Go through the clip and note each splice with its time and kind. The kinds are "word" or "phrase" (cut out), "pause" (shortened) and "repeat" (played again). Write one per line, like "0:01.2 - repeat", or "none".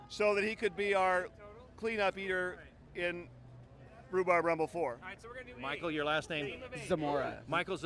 none